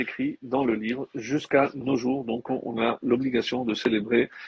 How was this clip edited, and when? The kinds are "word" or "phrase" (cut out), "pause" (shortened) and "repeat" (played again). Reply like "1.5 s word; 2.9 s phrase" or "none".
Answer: none